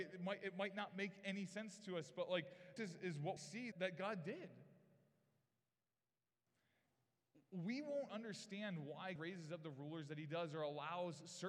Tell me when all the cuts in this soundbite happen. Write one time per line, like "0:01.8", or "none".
0:02.8
0:03.4
0:03.7
0:08.1
0:09.2